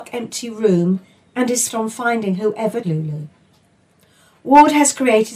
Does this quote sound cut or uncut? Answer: cut